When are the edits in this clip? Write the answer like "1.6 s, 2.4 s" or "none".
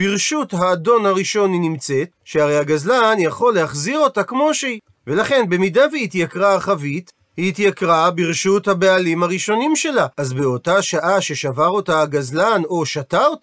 2.1 s, 10.1 s